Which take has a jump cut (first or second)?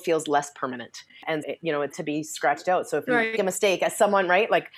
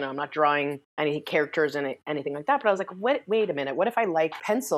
first